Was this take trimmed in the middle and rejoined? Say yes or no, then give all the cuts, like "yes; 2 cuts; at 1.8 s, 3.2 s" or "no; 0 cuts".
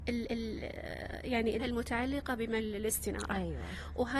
yes; 2 cuts; at 1.6 s, 2.6 s